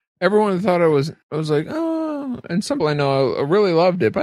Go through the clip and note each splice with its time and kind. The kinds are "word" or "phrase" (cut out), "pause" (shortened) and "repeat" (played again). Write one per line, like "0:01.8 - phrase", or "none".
0:01.2 - pause
0:02.8 - word